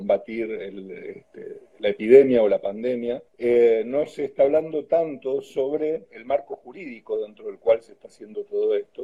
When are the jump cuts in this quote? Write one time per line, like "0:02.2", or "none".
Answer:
0:01.7
0:03.3